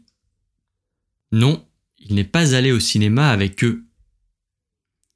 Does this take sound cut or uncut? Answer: uncut